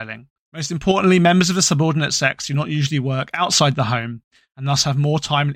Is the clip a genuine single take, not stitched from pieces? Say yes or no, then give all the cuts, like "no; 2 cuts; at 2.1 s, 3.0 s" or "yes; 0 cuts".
yes; 0 cuts